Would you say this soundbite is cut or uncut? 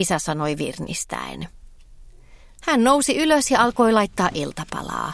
uncut